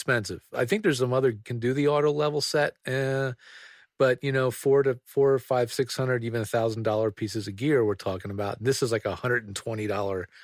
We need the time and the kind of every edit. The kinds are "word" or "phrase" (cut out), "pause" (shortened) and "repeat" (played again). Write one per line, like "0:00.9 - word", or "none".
0:01.4 - phrase